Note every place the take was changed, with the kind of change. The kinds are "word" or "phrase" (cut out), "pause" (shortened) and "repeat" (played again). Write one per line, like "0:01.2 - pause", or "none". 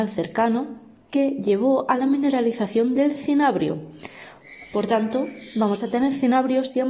none